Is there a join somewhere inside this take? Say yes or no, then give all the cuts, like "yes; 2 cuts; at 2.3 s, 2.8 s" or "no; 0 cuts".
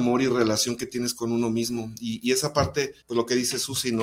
yes; 1 cut; at 3.0 s